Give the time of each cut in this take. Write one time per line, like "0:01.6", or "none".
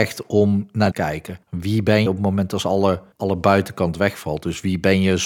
0:00.9
0:01.4
0:02.1
0:03.1